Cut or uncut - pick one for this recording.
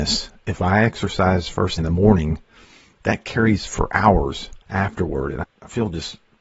cut